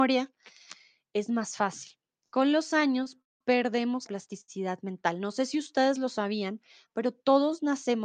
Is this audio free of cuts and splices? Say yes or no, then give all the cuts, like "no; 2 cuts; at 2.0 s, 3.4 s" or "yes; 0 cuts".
no; 1 cut; at 4.1 s